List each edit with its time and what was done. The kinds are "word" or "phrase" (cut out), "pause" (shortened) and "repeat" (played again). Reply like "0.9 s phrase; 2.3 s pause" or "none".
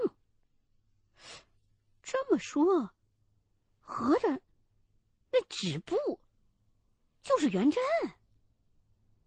none